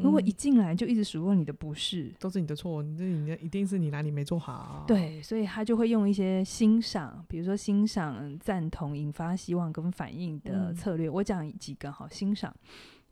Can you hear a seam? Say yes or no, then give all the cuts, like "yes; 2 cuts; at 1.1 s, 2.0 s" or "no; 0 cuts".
yes; 1 cut; at 8.4 s